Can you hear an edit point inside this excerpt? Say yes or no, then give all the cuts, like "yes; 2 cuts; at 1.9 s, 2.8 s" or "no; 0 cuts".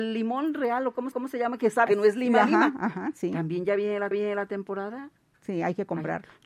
yes; 3 cuts; at 1.1 s, 1.9 s, 4.1 s